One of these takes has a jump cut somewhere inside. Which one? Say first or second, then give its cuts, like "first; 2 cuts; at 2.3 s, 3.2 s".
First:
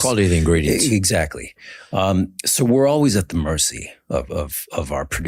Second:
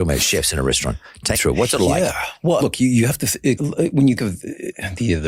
second; 4 cuts; at 1.3 s, 2.6 s, 3.6 s, 4.2 s